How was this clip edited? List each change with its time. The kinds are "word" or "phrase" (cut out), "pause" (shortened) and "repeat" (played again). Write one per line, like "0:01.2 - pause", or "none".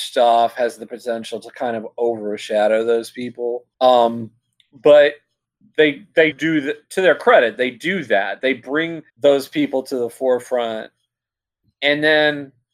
0:03.7 - pause
0:06.3 - word
0:09.1 - pause